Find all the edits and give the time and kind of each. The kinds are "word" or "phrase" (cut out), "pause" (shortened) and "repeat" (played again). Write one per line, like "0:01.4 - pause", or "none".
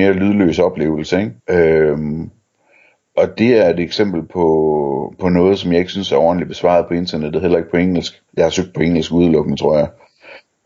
0:01.4 - pause
0:08.3 - pause